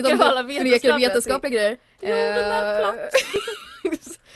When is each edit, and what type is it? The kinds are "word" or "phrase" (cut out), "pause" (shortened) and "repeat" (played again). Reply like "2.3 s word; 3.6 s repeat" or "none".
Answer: none